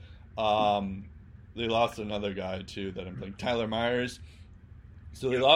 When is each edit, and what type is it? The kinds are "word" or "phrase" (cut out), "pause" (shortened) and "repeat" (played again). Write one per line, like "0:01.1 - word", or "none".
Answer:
none